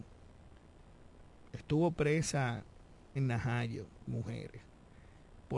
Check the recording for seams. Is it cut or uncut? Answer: cut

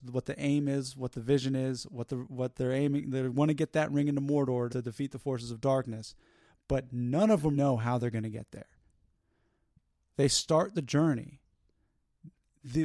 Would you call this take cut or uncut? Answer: cut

